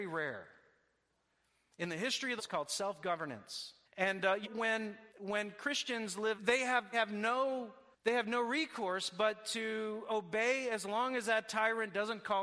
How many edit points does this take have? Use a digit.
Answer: 7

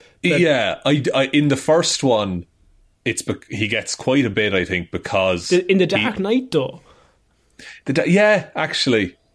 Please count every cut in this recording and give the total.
0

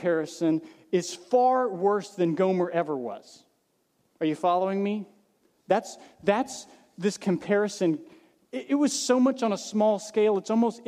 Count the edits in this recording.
0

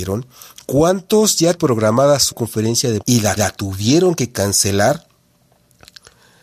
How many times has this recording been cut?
4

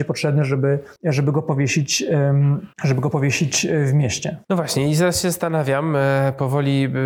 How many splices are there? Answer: 3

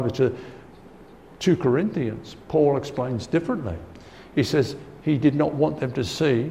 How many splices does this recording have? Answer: 0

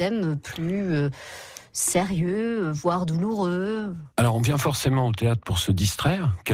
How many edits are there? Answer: 1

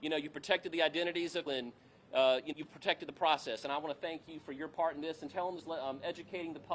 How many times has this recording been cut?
3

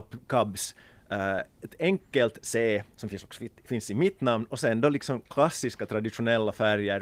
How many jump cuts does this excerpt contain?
0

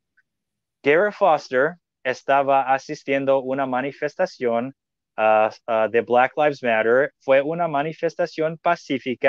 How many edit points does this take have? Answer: 0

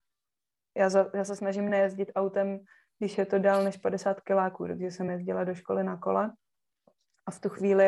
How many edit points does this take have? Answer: 0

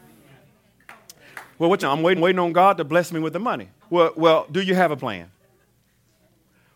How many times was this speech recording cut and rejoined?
4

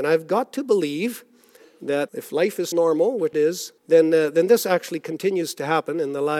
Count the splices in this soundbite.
4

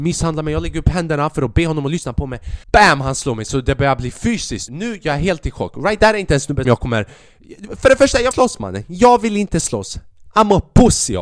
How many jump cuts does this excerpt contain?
4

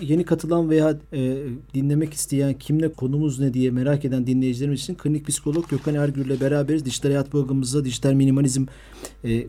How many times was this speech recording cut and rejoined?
2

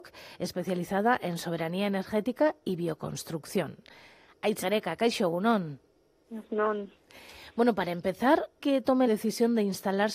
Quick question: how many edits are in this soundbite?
3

